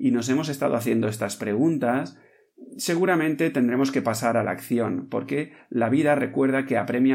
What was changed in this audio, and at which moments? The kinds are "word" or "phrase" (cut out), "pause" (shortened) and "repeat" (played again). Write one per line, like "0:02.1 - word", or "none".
none